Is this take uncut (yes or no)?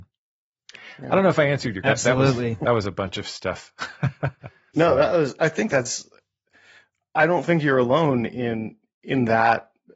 no